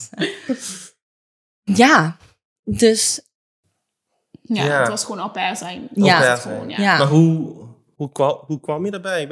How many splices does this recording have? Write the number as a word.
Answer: zero